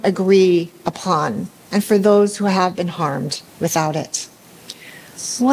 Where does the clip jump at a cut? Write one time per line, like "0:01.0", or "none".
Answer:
0:03.5